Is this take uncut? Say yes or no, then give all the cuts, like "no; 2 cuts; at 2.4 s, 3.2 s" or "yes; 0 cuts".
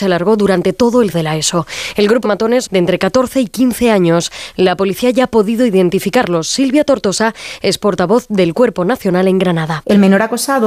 no; 3 cuts; at 1.1 s, 2.2 s, 2.7 s